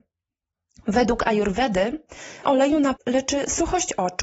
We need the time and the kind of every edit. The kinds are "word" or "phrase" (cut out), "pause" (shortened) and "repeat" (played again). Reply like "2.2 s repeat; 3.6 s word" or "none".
2.4 s word; 3.0 s word